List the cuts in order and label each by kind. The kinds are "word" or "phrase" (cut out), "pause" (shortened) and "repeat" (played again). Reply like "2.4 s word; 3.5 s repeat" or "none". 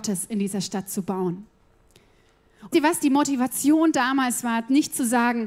2.7 s word